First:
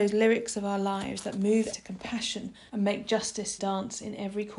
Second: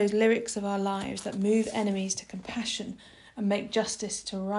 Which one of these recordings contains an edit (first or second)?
first